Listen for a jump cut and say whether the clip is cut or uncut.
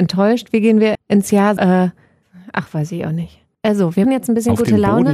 cut